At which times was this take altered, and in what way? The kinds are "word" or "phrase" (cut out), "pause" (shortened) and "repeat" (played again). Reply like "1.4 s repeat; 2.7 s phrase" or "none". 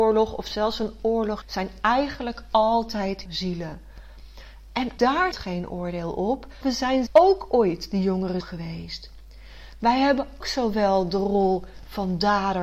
1.4 s word; 3.3 s word; 5.0 s word; 5.3 s word; 6.6 s word; 7.1 s word; 8.4 s word; 10.4 s word